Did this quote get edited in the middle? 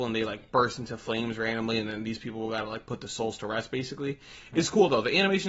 no; 0 cuts

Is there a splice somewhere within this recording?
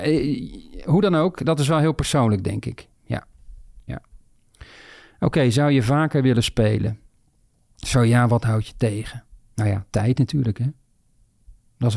no; 0 cuts

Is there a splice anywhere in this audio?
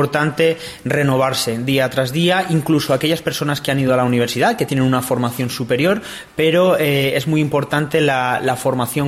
no; 0 cuts

